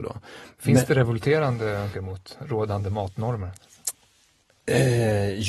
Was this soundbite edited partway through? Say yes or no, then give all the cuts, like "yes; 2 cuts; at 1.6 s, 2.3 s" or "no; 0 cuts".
yes; 1 cut; at 1.9 s